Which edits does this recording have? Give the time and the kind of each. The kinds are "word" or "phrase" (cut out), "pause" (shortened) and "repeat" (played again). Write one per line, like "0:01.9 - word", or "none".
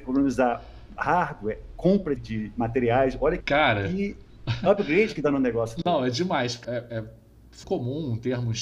0:02.2 - word
0:03.4 - word
0:06.6 - word
0:07.6 - word